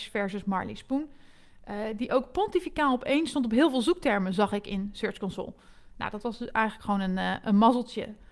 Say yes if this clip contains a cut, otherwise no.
no